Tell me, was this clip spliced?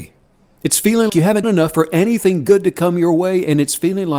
yes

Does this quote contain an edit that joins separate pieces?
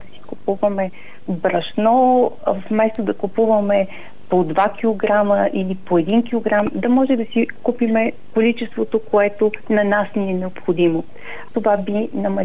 no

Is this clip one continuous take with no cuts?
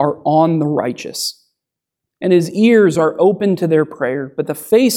yes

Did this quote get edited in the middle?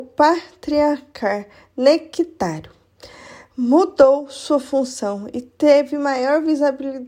no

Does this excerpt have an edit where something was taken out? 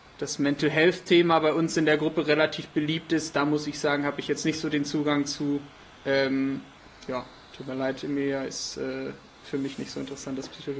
no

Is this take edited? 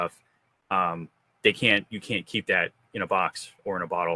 no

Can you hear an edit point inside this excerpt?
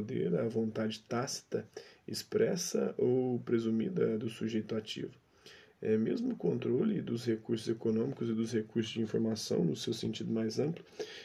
no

